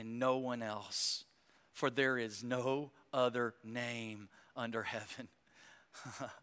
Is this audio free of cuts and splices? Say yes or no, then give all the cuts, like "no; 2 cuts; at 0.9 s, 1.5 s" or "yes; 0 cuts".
yes; 0 cuts